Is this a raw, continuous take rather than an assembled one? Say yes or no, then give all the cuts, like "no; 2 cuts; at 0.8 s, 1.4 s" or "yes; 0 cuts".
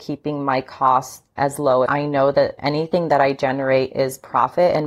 no; 3 cuts; at 1.4 s, 1.9 s, 2.6 s